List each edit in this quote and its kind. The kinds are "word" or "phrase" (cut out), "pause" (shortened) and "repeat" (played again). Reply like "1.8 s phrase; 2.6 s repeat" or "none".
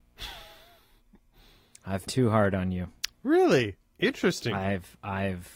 2.1 s word